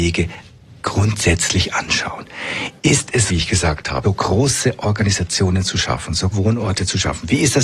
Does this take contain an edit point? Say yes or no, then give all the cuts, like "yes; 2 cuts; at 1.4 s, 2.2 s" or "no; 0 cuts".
yes; 3 cuts; at 3.3 s, 4.0 s, 6.3 s